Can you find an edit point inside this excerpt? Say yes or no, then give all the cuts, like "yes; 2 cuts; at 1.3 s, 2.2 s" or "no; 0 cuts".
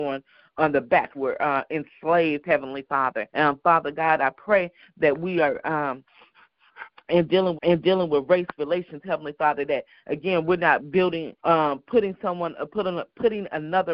yes; 4 cuts; at 1.1 s, 3.3 s, 7.5 s, 11.4 s